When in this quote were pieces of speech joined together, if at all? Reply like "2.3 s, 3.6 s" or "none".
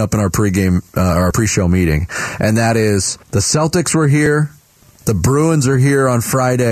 3.2 s